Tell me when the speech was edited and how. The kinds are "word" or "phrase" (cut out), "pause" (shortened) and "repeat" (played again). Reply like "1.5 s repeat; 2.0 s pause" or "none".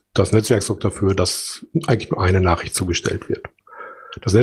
none